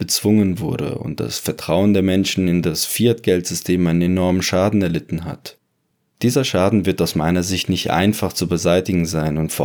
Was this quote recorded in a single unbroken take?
yes; 0 cuts

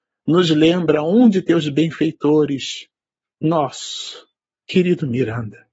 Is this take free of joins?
no; 1 cut; at 4.4 s

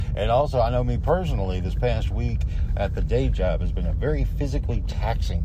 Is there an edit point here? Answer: no; 0 cuts

